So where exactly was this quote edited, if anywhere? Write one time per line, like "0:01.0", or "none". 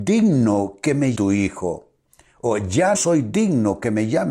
0:01.1
0:02.9